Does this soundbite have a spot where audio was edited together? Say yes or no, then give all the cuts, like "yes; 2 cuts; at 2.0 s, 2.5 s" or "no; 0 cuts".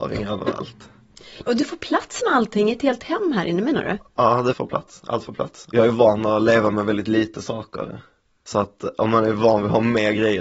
no; 0 cuts